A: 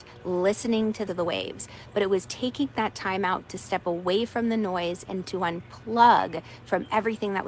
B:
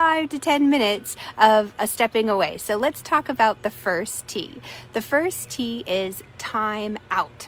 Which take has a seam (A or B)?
A